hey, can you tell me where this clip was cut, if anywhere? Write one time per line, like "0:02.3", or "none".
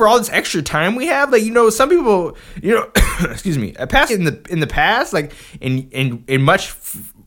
0:04.1
0:05.9